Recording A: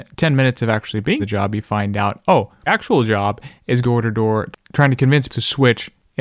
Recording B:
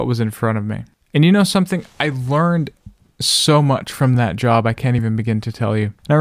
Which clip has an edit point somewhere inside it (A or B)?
A